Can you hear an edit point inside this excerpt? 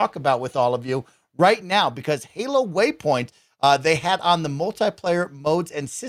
no; 0 cuts

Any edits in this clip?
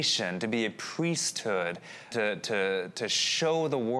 yes; 1 cut; at 2.1 s

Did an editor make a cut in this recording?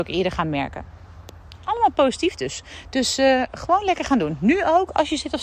no; 0 cuts

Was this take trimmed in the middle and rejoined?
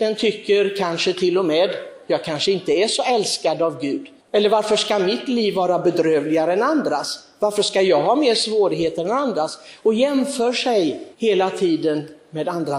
yes; 2 cuts; at 4.2 s, 11.1 s

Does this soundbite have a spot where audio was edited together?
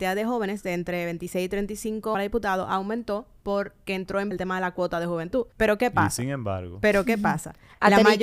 yes; 4 cuts; at 2.1 s, 3.9 s, 4.3 s, 5.5 s

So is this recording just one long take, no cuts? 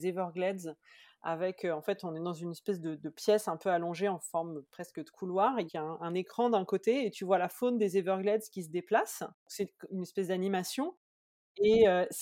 no; 4 cuts; at 4.6 s, 5.7 s, 6.0 s, 9.4 s

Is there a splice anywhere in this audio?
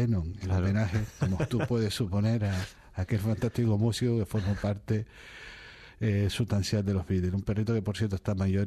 no; 0 cuts

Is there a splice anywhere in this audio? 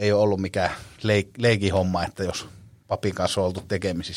no; 0 cuts

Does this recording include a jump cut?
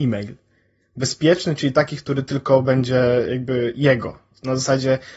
no; 0 cuts

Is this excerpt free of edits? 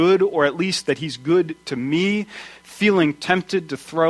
yes; 0 cuts

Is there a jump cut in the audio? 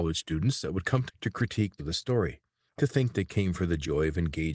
yes; 3 cuts; at 1.1 s, 1.8 s, 2.8 s

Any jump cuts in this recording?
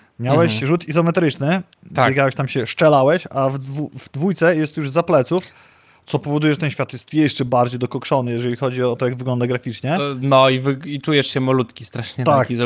no; 0 cuts

